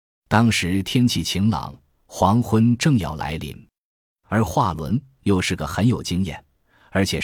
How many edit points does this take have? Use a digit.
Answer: 0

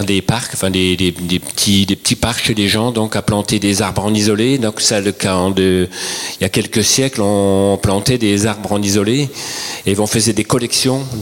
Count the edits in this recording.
0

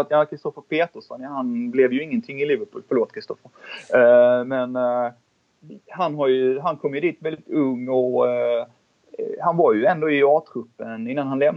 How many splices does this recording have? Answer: 0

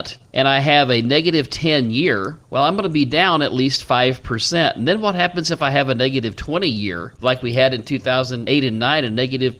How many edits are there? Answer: 1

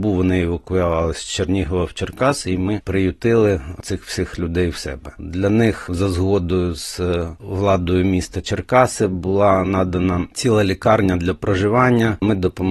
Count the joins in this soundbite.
0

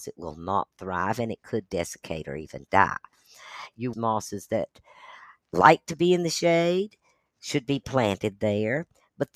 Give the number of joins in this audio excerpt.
1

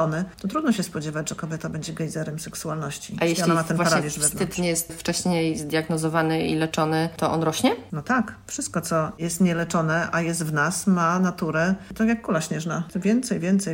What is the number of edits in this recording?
0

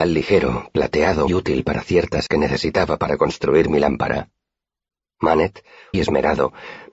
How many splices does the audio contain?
3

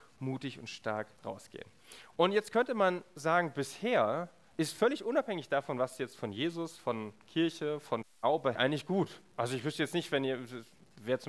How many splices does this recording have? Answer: 2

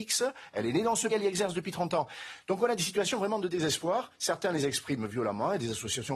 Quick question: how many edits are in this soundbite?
1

